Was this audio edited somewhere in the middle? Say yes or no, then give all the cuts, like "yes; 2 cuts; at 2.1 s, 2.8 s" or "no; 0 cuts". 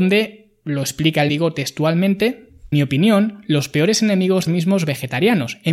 yes; 3 cuts; at 1.3 s, 2.7 s, 4.5 s